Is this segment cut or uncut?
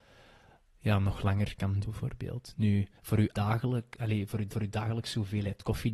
cut